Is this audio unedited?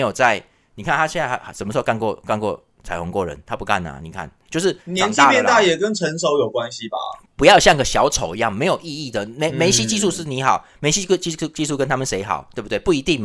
no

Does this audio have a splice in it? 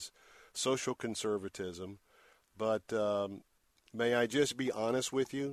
no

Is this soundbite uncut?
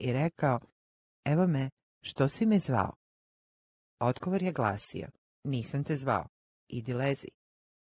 yes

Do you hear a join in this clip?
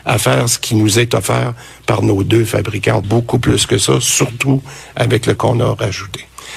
yes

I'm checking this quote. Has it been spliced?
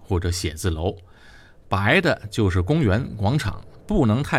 no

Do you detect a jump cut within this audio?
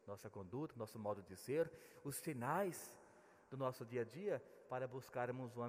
no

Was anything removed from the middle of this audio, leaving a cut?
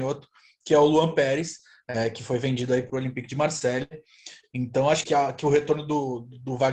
yes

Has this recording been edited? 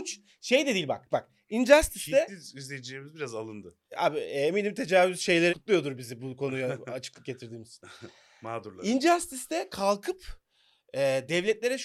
yes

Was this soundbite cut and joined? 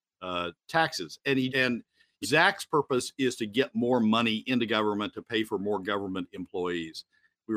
yes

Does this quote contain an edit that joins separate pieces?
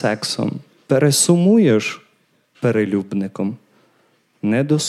yes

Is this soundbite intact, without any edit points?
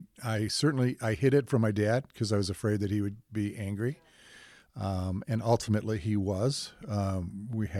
yes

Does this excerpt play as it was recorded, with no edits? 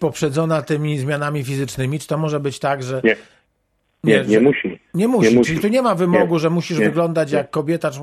yes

